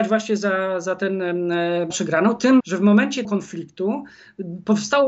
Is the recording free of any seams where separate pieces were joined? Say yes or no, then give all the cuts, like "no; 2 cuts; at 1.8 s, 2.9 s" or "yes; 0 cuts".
no; 3 cuts; at 1.9 s, 2.6 s, 3.2 s